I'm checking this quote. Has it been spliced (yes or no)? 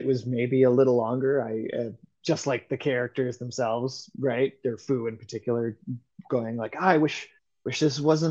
no